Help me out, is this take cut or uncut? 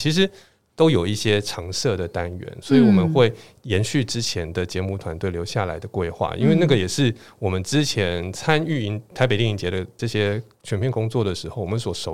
uncut